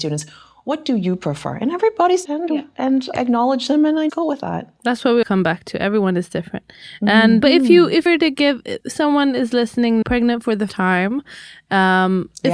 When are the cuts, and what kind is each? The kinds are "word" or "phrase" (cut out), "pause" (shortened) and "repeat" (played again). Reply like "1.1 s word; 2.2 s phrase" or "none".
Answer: 2.2 s word; 3.1 s word; 4.1 s word; 5.2 s word; 7.4 s word; 8.1 s word; 8.8 s word; 10.0 s word; 10.7 s word